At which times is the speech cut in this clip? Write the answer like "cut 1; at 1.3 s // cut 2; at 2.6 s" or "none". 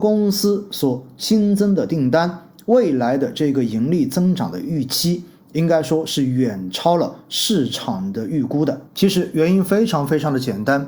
cut 1; at 8.9 s